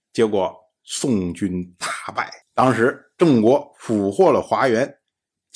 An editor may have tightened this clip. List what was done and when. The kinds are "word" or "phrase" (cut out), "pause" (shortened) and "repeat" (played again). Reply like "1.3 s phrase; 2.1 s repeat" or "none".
2.4 s pause